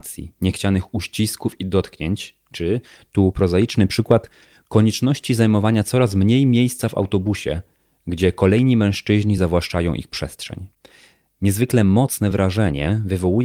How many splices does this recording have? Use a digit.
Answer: 0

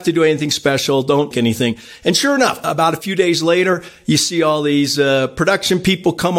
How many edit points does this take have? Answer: 2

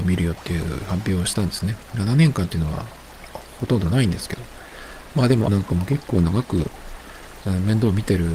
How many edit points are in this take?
1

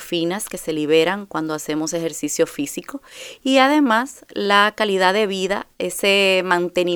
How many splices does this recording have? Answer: 0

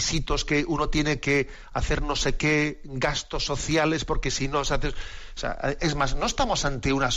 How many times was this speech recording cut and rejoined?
0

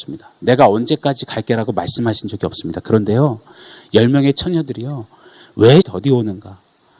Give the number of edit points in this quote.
1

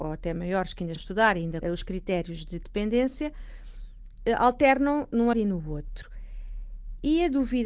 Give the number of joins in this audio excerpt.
3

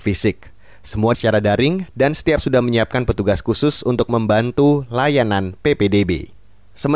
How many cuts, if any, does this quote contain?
2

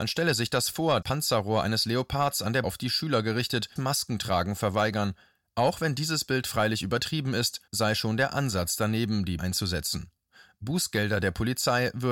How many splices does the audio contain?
5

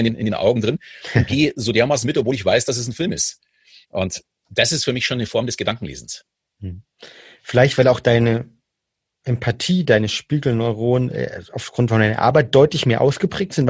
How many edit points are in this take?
0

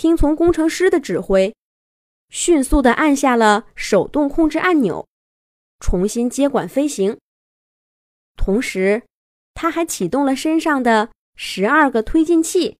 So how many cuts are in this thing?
0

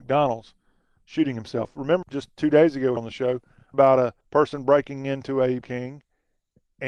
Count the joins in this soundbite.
5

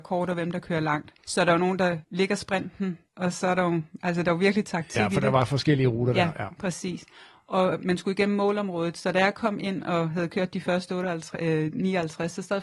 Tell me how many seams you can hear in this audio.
3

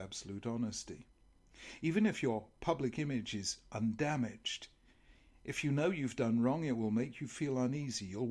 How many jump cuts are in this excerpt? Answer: 0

